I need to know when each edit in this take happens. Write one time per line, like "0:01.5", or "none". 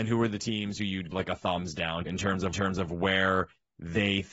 0:01.1
0:02.1
0:02.5